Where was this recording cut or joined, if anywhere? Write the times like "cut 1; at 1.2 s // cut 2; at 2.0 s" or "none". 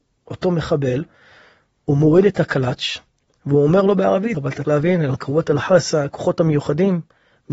cut 1; at 4.3 s // cut 2; at 4.6 s